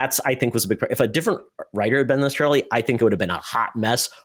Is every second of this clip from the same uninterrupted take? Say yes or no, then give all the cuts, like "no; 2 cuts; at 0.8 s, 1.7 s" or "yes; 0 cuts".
yes; 0 cuts